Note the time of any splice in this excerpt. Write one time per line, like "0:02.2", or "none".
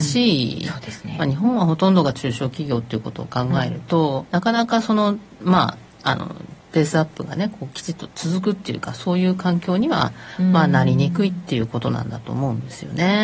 0:04.3